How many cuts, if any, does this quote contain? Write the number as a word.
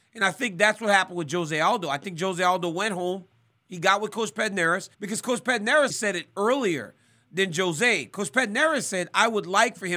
two